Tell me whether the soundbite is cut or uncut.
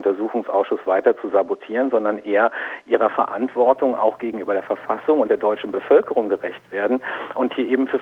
uncut